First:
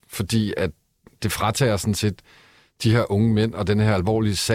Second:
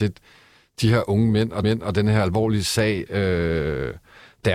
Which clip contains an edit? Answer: second; 1 cut; at 1.6 s

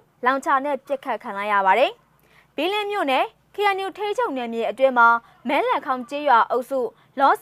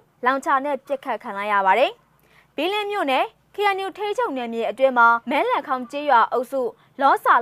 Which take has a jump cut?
second; 1 cut; at 5.2 s

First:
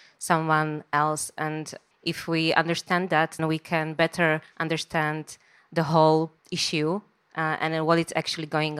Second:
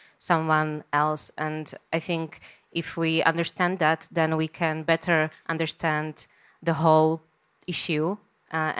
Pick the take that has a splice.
first; 3 cuts; at 1.9 s, 3.4 s, 6.4 s

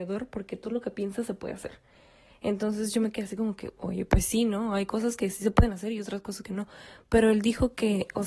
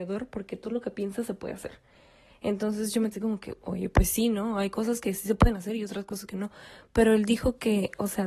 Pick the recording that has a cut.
second; 1 cut; at 3.1 s

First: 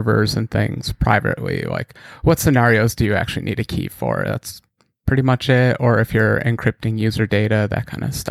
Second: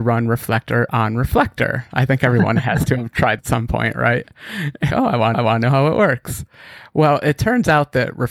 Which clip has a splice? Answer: second; 3 cuts; at 3.4 s, 4.9 s, 5.3 s

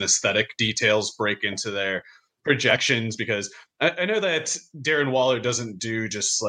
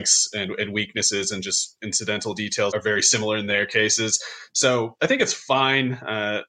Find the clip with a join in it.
second; 1 cut; at 2.7 s

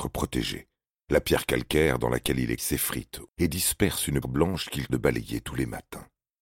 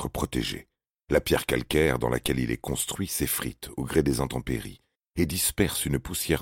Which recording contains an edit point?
first; 4 cuts; at 2.6 s, 3.3 s, 4.2 s, 4.9 s

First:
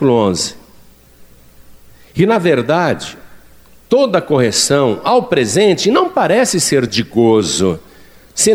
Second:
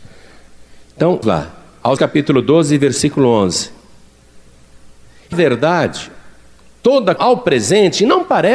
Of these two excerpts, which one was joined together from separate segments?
second; 4 cuts; at 1.2 s, 2.0 s, 5.3 s, 7.2 s

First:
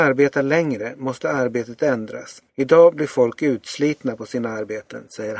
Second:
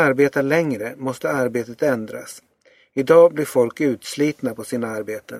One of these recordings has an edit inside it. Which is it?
first; 1 cut; at 2.5 s

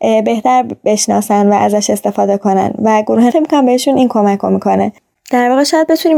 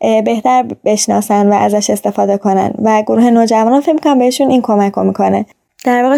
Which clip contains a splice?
first; 1 cut; at 3.3 s

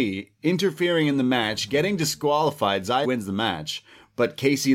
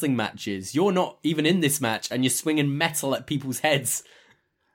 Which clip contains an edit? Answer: first; 1 cut; at 3.0 s

